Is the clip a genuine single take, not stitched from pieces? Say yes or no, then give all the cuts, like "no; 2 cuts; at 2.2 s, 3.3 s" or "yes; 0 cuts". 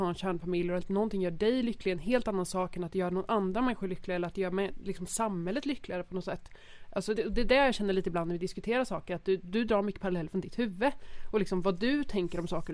no; 1 cut; at 7.2 s